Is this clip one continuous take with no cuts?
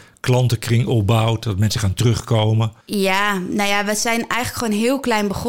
no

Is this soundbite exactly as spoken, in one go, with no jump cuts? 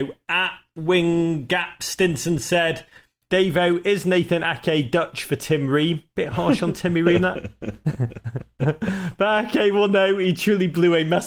yes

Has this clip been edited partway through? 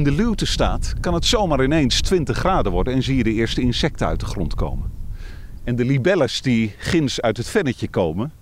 no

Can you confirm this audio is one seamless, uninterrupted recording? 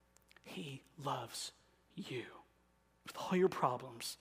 yes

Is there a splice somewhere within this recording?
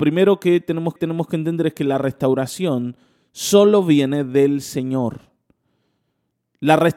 yes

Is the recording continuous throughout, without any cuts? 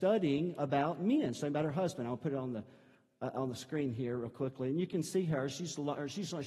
yes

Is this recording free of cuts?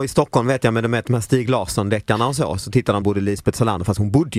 no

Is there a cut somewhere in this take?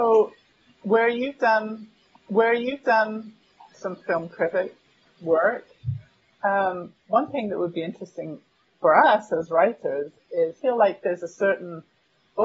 yes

